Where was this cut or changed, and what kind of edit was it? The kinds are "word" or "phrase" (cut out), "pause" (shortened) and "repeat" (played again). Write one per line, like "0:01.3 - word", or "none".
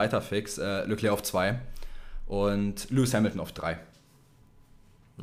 none

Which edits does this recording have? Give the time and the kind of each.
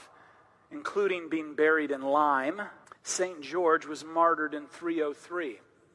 0:02.8 - pause

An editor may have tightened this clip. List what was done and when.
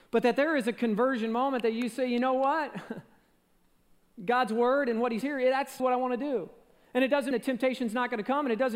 0:05.2 - word
0:05.8 - word
0:07.3 - word

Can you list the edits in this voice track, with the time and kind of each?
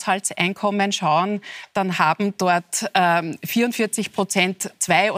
none

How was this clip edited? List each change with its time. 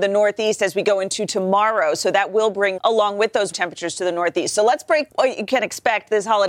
0:02.8 - word
0:03.5 - word
0:05.1 - word

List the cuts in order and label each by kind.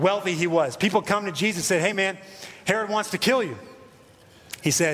none

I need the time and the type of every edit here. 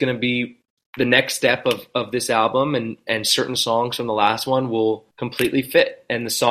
0:05.1 - pause

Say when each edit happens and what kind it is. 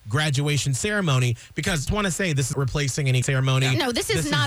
0:01.9 - word
0:02.5 - word
0:03.2 - word

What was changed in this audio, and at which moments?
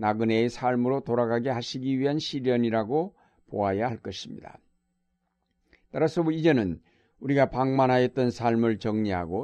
none

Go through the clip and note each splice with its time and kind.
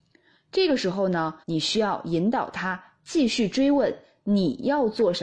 0:01.4 - pause

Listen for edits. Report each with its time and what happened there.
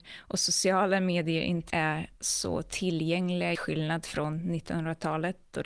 0:01.7 - word
0:02.2 - pause
0:03.5 - phrase

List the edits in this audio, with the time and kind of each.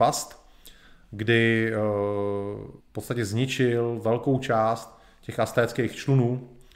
0:02.8 - pause

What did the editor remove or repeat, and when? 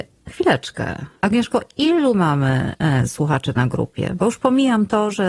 0:01.2 - word

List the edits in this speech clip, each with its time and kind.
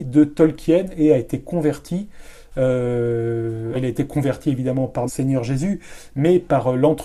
0:03.7 - word
0:05.1 - word

